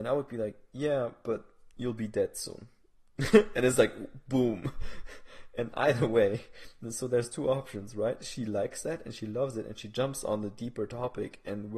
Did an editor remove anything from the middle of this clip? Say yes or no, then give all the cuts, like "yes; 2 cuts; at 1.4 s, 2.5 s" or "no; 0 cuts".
no; 0 cuts